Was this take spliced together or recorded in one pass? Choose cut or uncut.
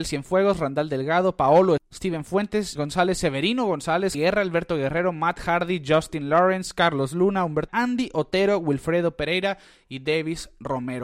cut